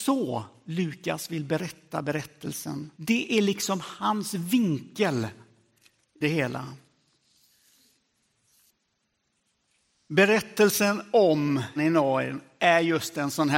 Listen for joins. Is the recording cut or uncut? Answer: cut